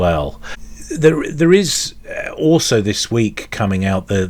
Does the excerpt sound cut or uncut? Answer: uncut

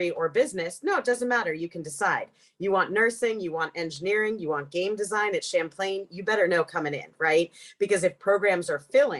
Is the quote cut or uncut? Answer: uncut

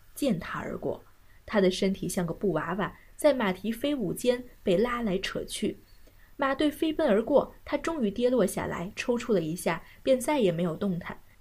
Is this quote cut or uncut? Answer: uncut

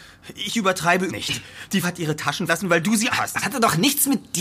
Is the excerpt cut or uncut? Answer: cut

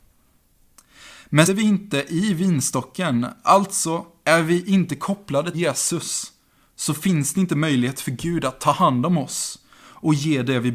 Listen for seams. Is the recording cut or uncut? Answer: cut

